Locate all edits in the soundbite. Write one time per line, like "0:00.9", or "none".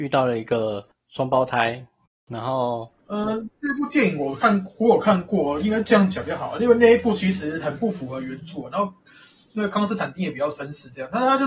0:00.9
0:03.0